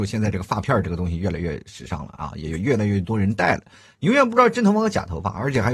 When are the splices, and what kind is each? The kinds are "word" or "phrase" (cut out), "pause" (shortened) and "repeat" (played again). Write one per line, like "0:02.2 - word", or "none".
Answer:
none